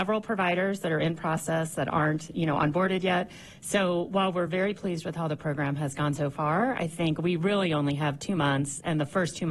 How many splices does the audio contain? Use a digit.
0